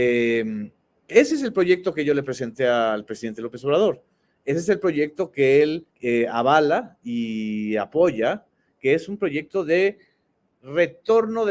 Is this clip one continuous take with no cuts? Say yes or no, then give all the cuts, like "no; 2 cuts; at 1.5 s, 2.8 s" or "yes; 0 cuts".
no; 1 cut; at 5.9 s